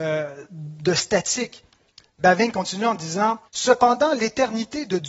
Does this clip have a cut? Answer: yes; 1 cut; at 3.5 s

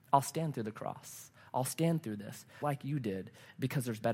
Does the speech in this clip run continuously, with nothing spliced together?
no; 1 cut; at 2.6 s

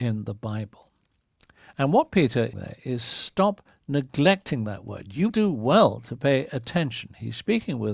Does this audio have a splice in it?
yes; 2 cuts; at 2.5 s, 5.3 s

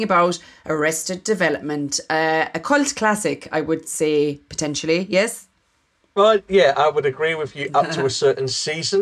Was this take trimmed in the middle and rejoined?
no; 0 cuts

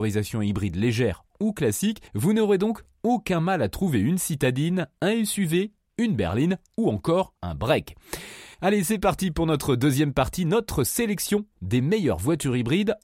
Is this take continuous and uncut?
no; 3 cuts; at 2.1 s, 7.4 s, 8.5 s

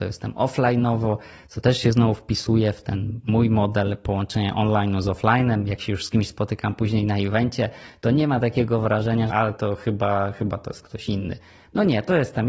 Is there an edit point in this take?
yes; 1 cut; at 9.3 s

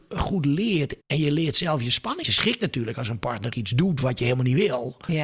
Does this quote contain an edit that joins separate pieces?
yes; 2 cuts; at 1.0 s, 2.2 s

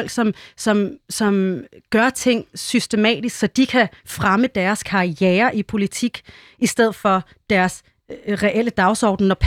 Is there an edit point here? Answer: no; 0 cuts

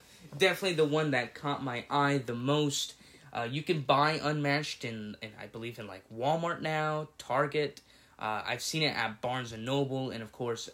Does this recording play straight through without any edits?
yes; 0 cuts

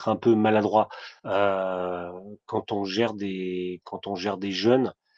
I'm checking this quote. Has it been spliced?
yes; 1 cut; at 1.2 s

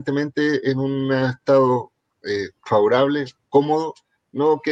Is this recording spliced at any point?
yes; 1 cut; at 2.6 s

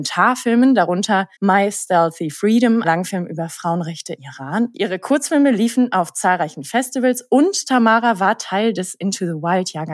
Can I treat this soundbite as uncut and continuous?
no; 3 cuts; at 1.3 s, 2.8 s, 4.2 s

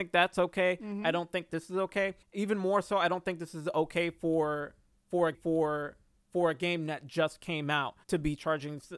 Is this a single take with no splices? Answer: no; 4 cuts; at 1.5 s, 2.2 s, 5.3 s, 8.0 s

